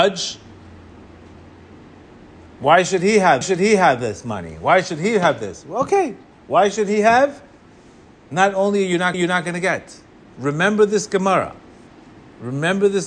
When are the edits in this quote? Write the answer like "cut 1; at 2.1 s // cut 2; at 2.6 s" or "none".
cut 1; at 3.4 s // cut 2; at 9.1 s